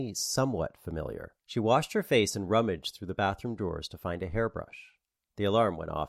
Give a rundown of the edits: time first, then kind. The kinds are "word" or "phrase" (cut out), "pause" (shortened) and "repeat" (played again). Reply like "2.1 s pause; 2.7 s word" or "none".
1.4 s pause